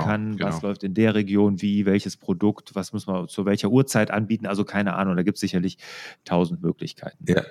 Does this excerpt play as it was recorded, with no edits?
yes; 0 cuts

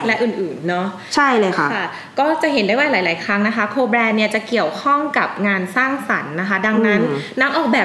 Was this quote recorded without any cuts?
yes; 0 cuts

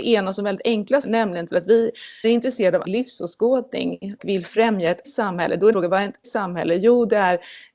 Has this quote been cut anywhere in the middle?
yes; 8 cuts; at 1.0 s, 1.5 s, 2.2 s, 2.8 s, 4.2 s, 5.0 s, 5.7 s, 6.2 s

